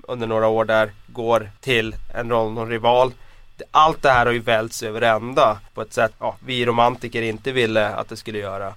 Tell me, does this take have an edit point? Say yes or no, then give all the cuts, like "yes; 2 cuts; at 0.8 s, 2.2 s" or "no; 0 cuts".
yes; 3 cuts; at 1.6 s, 5.7 s, 6.1 s